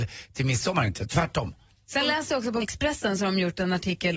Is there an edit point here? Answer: yes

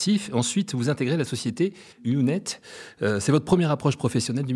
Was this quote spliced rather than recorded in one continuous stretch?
yes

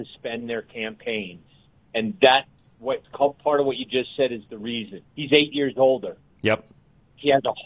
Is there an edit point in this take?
yes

